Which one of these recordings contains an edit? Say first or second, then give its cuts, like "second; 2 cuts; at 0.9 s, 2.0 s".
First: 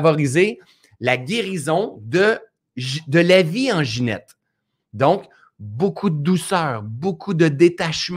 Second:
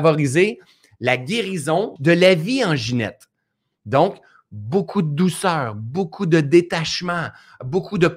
second; 1 cut; at 2.0 s